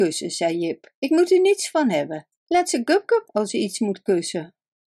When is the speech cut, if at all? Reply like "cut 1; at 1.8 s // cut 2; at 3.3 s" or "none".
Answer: cut 1; at 2.4 s // cut 2; at 3.2 s